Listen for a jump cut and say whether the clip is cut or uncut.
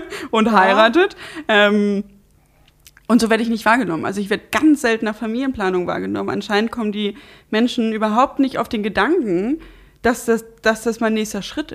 uncut